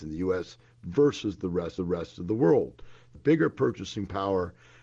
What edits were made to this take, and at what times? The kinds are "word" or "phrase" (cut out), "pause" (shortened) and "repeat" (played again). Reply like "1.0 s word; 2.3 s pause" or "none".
1.8 s repeat; 3.1 s phrase